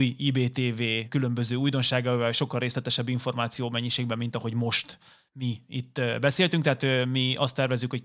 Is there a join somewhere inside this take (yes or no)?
no